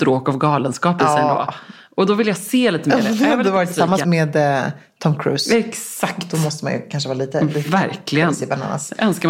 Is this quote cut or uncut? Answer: cut